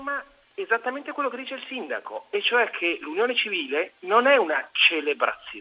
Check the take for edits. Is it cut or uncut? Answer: uncut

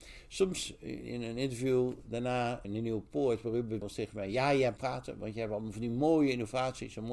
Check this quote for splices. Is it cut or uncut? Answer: cut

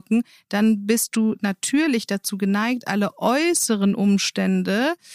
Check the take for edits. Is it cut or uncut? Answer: uncut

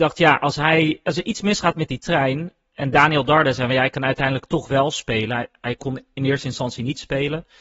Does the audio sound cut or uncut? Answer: uncut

